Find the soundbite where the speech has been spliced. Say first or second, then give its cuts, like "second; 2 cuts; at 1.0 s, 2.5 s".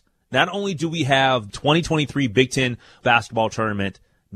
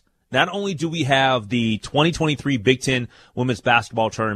first; 2 cuts; at 1.5 s, 3.0 s